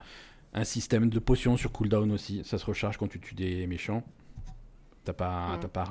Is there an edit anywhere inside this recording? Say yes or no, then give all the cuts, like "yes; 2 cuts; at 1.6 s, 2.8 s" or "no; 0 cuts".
yes; 1 cut; at 1.1 s